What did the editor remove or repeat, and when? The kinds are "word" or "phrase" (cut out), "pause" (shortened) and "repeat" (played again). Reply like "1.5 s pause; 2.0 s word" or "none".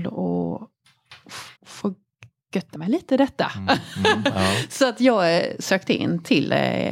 1.6 s pause; 2.7 s word